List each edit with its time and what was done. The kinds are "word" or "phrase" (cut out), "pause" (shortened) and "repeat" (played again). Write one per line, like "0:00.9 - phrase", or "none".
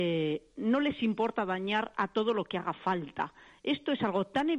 none